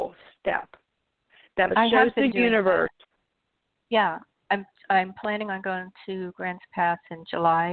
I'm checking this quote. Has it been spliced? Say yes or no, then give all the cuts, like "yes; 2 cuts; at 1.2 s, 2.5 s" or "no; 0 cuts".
no; 0 cuts